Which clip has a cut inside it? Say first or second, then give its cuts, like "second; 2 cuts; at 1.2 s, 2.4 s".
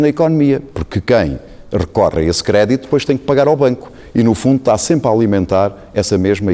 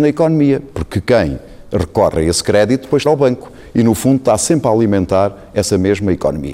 second; 1 cut; at 3.1 s